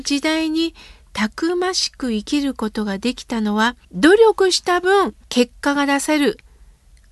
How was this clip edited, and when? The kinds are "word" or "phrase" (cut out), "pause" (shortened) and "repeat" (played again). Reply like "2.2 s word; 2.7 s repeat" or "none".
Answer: 3.8 s pause; 5.2 s pause